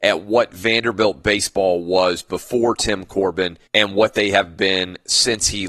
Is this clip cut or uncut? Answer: cut